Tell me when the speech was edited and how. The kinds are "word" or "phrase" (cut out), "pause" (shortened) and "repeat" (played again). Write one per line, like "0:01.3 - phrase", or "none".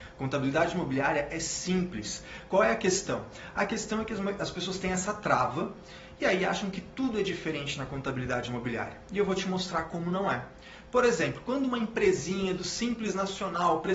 none